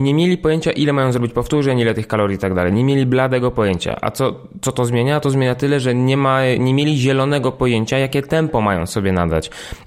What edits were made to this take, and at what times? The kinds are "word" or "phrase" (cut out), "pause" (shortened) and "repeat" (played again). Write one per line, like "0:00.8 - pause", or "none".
none

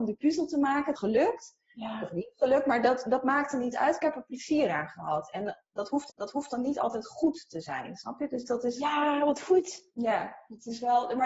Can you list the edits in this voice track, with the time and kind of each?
0:01.0 - phrase
0:06.1 - repeat
0:09.9 - pause

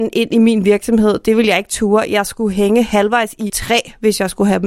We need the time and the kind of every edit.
0:03.5 - word

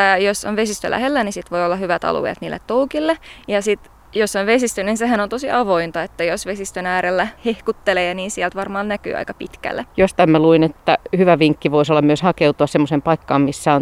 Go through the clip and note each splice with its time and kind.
0:07.4 - pause
0:09.9 - pause

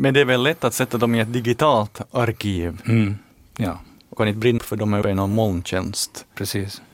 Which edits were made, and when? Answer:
0:03.3 - word
0:04.2 - word
0:04.6 - word
0:05.0 - word

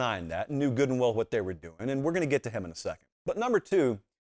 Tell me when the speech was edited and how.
0:03.1 - pause

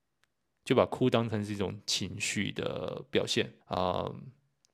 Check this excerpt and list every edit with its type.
0:03.6 - pause

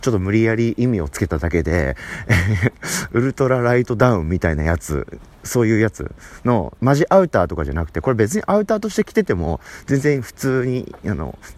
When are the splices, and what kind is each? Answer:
0:06.8 - phrase

